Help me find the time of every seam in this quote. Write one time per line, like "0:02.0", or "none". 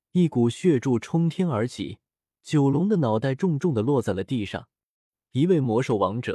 0:02.1